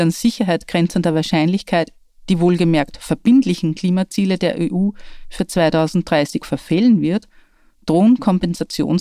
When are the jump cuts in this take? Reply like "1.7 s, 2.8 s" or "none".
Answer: none